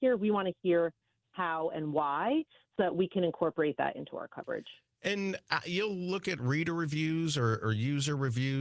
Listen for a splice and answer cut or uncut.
uncut